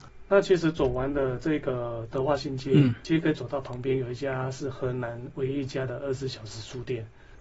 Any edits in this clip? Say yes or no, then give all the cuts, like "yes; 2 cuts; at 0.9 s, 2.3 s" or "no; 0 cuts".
no; 0 cuts